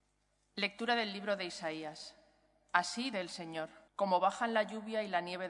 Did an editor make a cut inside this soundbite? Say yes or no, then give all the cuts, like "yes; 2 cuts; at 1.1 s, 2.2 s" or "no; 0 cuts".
yes; 2 cuts; at 3.1 s, 3.9 s